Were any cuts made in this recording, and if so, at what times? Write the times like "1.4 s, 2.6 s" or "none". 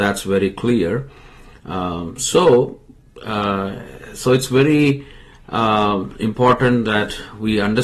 none